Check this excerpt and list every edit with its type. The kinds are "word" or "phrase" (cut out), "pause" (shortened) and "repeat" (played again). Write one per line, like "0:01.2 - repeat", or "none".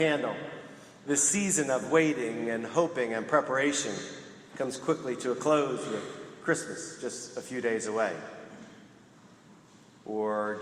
none